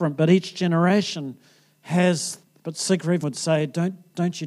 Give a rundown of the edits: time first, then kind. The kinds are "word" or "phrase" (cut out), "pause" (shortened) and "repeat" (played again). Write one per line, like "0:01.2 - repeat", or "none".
0:02.6 - phrase
0:03.2 - word